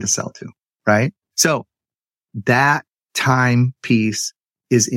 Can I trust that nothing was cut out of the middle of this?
no; 1 cut; at 1.2 s

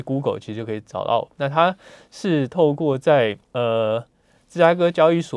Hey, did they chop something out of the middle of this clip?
yes; 1 cut; at 3.4 s

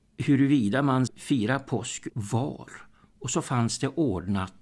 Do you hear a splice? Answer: yes; 2 cuts; at 1.1 s, 2.1 s

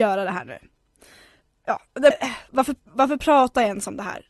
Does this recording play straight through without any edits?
no; 1 cut; at 2.1 s

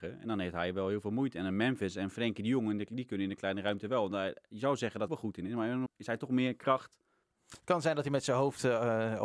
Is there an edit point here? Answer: yes; 3 cuts; at 5.1 s, 5.9 s, 7.2 s

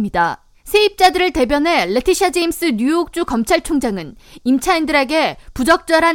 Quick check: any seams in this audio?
no; 0 cuts

